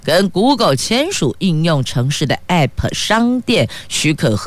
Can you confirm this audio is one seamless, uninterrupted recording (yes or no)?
yes